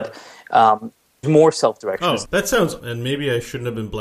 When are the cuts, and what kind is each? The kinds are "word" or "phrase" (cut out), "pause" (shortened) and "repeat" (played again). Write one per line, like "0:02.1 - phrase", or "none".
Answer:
0:01.2 - word
0:02.2 - word
0:02.8 - word